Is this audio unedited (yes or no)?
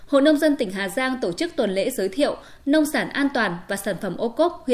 yes